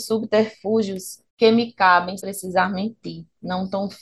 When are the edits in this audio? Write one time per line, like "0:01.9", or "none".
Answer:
0:01.3
0:02.2